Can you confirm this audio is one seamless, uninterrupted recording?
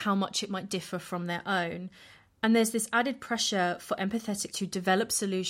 no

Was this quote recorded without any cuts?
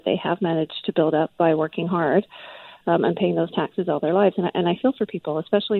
yes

